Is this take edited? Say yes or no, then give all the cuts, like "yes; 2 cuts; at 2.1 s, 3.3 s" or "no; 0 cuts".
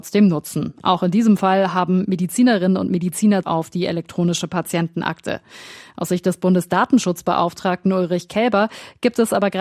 yes; 1 cut; at 3.4 s